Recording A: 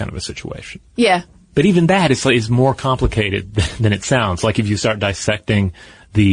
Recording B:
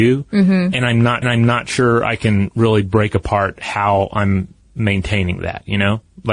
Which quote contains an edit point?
B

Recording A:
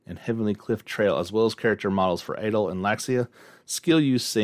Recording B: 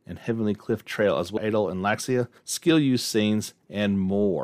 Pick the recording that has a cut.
B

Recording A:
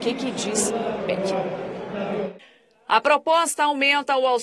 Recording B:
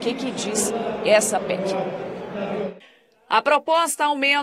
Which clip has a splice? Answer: A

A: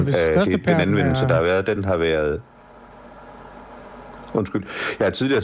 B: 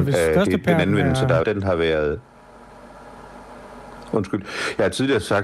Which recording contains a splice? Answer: B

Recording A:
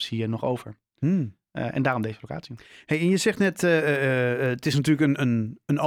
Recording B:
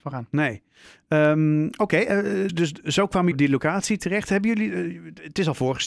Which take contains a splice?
B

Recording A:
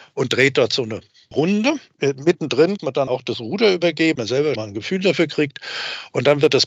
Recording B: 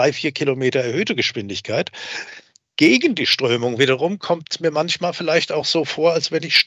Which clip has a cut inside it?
A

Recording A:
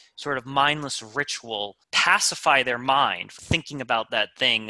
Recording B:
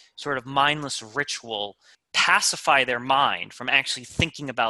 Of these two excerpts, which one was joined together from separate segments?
A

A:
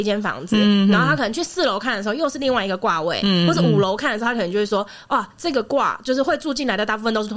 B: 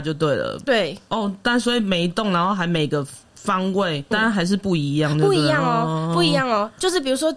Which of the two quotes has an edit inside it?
B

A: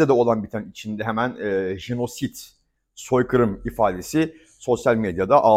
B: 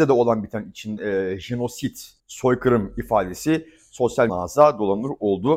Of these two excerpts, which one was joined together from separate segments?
B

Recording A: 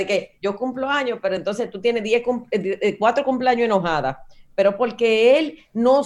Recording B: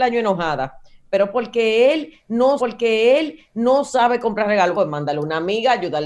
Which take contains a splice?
B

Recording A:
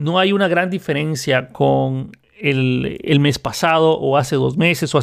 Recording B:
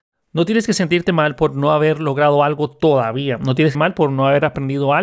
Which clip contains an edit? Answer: B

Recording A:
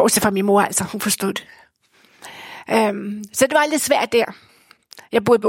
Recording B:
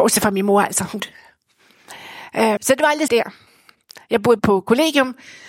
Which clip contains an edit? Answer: B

